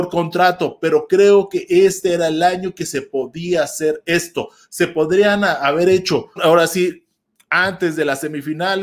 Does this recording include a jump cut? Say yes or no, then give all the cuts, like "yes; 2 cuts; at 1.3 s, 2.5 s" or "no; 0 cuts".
yes; 1 cut; at 6.4 s